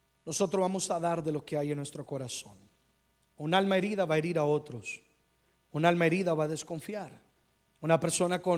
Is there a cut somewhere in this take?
no; 0 cuts

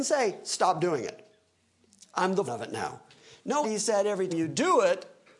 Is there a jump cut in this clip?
yes; 3 cuts; at 2.5 s, 3.6 s, 4.3 s

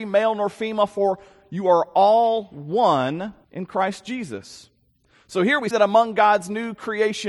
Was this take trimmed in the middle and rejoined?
yes; 2 cuts; at 3.4 s, 5.7 s

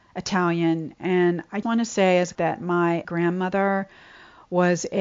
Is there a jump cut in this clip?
yes; 3 cuts; at 1.6 s, 2.3 s, 3.0 s

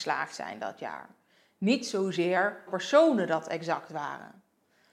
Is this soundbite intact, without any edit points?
no; 1 cut; at 2.7 s

